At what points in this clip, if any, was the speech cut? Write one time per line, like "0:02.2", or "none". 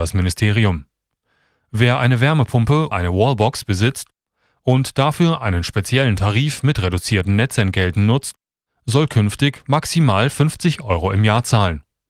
0:02.9